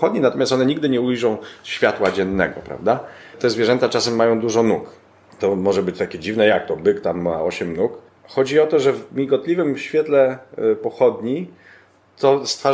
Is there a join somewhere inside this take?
no; 0 cuts

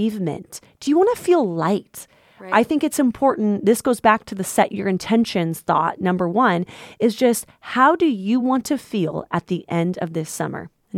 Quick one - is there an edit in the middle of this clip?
no; 0 cuts

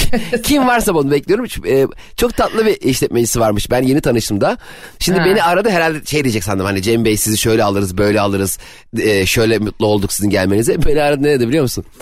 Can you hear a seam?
no; 0 cuts

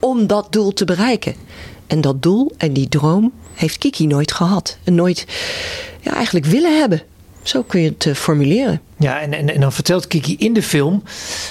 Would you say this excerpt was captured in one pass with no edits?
yes; 0 cuts

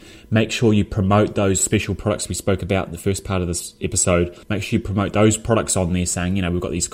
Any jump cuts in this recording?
yes; 1 cut; at 4.4 s

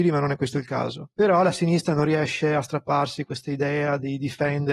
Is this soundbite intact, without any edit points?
no; 1 cut; at 1.1 s

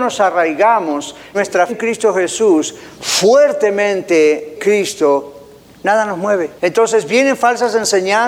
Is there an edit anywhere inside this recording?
yes; 4 cuts; at 1.3 s, 1.7 s, 4.6 s, 6.6 s

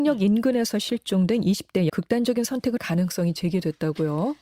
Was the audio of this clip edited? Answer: yes; 2 cuts; at 1.9 s, 2.8 s

